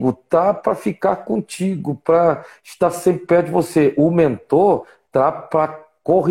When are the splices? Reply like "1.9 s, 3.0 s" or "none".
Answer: none